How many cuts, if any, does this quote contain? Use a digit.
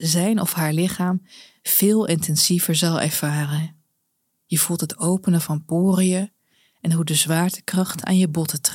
0